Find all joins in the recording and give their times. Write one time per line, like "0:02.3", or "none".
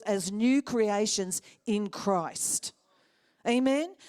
none